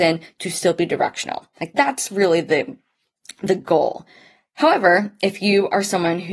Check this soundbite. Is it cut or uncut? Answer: uncut